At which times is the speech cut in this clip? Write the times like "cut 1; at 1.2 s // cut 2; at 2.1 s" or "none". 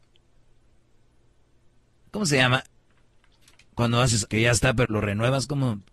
cut 1; at 4.3 s // cut 2; at 4.8 s